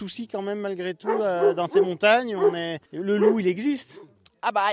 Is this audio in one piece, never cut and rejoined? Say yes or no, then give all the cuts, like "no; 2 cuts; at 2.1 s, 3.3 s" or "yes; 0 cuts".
no; 1 cut; at 2.9 s